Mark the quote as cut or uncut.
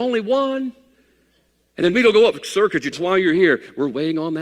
cut